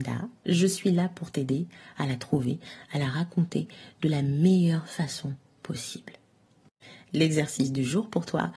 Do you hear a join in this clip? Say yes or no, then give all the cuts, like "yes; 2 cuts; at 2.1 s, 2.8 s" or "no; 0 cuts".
no; 0 cuts